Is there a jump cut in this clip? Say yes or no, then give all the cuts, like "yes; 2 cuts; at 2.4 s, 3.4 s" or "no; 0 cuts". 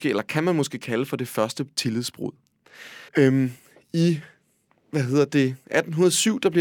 yes; 1 cut; at 3.1 s